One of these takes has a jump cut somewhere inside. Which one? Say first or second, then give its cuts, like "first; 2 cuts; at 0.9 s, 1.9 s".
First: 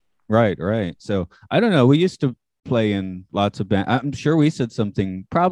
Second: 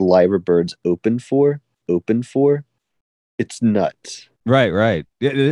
second; 2 cuts; at 1.8 s, 4.4 s